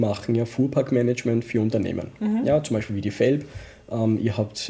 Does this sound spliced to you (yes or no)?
no